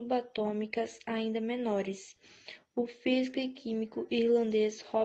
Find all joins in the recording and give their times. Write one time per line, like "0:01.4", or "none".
none